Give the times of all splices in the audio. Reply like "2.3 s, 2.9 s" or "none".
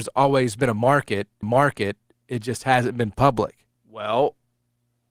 1.4 s, 3.8 s